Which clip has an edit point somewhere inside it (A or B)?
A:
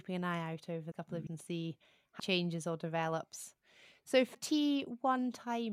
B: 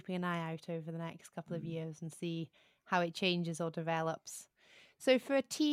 A